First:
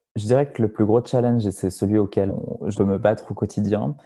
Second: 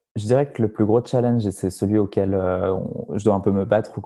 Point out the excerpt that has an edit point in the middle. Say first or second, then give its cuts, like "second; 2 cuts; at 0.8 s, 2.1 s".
first; 2 cuts; at 2.3 s, 2.8 s